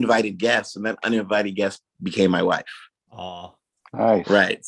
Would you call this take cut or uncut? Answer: uncut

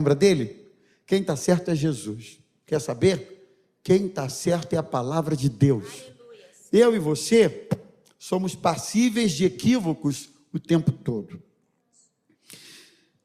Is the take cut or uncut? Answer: uncut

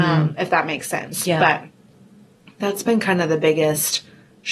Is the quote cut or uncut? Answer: uncut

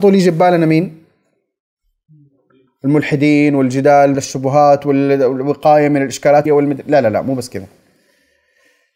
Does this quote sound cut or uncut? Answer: cut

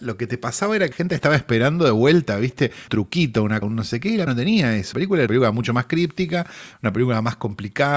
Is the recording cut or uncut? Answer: cut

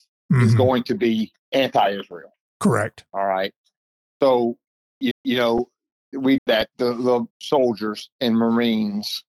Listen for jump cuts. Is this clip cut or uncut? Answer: cut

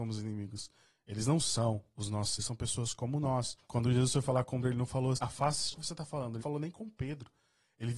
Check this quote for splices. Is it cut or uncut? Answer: cut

